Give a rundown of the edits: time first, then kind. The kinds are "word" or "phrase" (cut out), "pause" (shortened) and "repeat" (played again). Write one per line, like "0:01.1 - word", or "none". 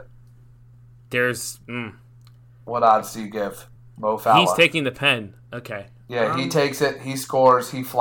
0:01.6 - pause
0:03.8 - pause